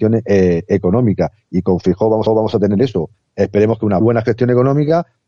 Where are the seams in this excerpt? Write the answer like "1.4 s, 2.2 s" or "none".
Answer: 2.3 s, 4.0 s